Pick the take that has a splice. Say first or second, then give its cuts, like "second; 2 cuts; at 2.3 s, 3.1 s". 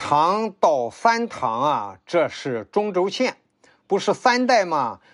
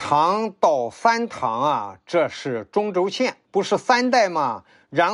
second; 1 cut; at 3.4 s